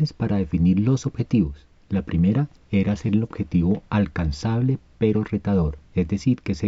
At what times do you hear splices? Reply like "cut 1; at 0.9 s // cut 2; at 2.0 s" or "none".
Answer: none